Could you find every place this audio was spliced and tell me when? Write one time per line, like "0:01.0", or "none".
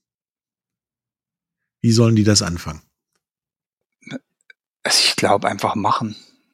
none

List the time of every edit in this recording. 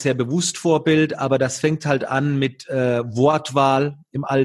none

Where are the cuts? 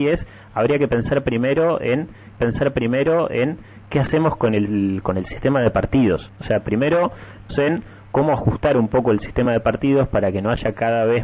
0:02.4
0:07.5

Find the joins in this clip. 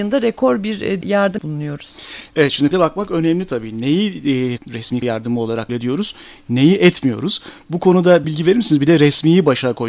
0:01.0
0:01.4
0:02.7
0:05.0
0:05.7
0:08.2

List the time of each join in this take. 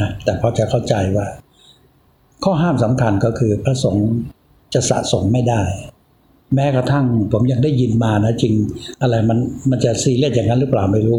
none

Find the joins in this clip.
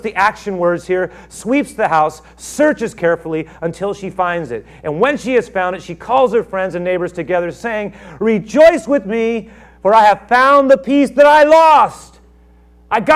none

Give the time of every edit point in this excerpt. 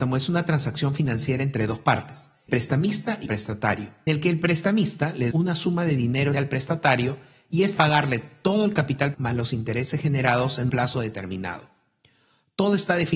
0:02.5
0:03.3
0:04.1
0:05.3
0:06.3
0:07.8
0:09.1
0:10.7

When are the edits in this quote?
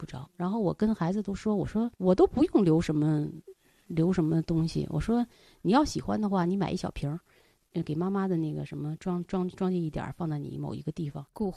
0:01.9

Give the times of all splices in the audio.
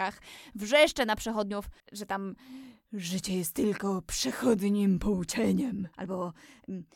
0:01.8
0:05.9

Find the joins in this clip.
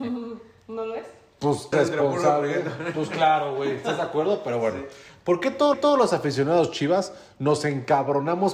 0:01.7
0:05.7

